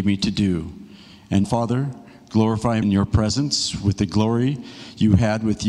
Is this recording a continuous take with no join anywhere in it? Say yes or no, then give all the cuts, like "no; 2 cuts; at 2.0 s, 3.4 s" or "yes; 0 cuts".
no; 2 cuts; at 1.4 s, 2.8 s